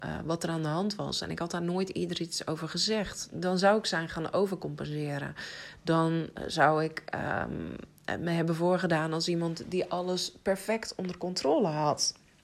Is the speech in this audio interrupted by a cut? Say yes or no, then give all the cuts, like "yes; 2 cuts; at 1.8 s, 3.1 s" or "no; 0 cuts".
no; 0 cuts